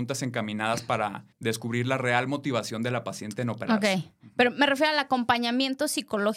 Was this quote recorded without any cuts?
no; 1 cut; at 1.3 s

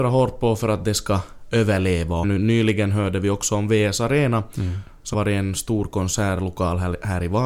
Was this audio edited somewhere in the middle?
yes; 2 cuts; at 2.2 s, 5.1 s

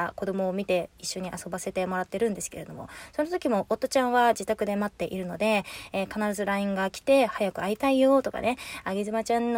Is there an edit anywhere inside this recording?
no; 0 cuts

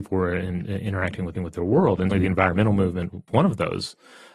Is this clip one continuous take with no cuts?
no; 3 cuts; at 1.3 s, 2.1 s, 3.3 s

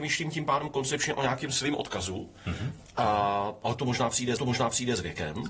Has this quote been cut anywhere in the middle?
yes; 1 cut; at 4.4 s

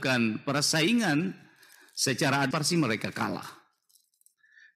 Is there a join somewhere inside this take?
yes; 1 cut; at 2.5 s

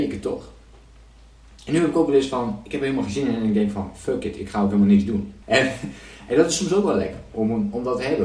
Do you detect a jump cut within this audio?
yes; 1 cut; at 5.4 s

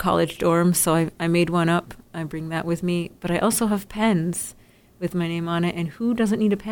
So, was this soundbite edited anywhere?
no; 0 cuts

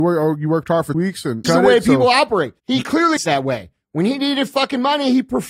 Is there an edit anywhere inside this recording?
yes; 4 cuts; at 0.9 s, 1.4 s, 2.6 s, 3.2 s

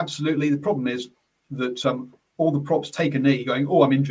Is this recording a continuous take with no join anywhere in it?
yes; 0 cuts

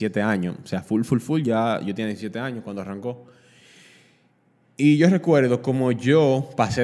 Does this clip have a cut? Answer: no; 0 cuts

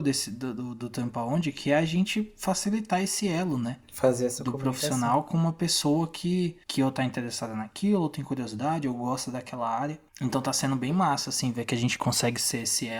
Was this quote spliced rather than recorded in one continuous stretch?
yes; 2 cuts; at 6.6 s, 10.1 s

